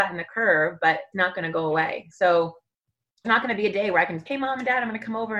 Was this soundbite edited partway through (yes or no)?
yes